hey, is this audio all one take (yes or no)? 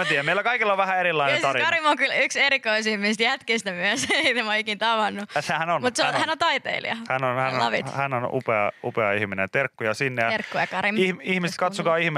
yes